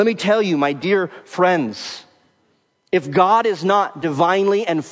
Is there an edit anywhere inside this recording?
no; 0 cuts

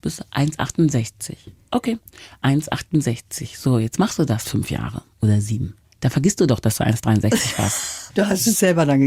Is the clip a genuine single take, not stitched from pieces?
yes; 0 cuts

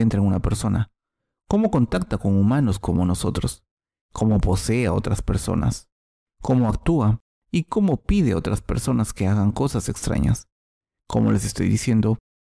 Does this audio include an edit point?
no; 0 cuts

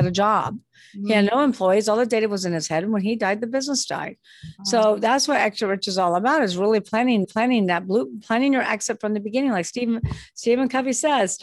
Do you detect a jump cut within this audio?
yes; 1 cut; at 7.2 s

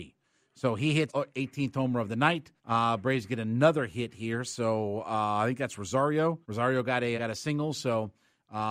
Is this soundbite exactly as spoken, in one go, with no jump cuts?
no; 4 cuts; at 1.1 s, 2.6 s, 6.4 s, 7.2 s

